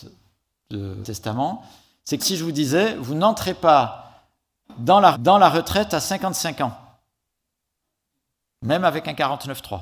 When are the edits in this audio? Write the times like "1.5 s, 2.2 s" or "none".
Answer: 1.0 s, 2.2 s, 5.1 s